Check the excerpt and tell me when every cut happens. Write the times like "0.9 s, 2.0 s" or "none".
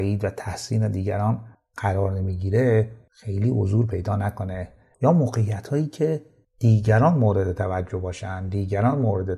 none

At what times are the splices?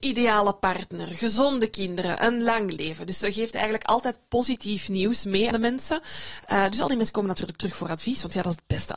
5.5 s

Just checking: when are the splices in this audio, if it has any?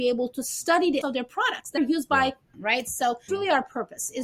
1.0 s, 1.8 s, 2.5 s, 3.3 s

